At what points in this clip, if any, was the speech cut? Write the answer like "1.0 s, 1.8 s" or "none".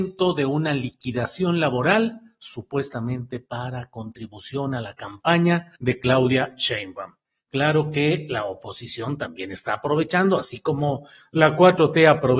5.8 s